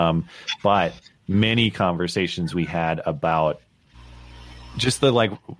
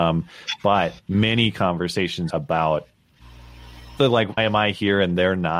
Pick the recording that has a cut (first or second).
second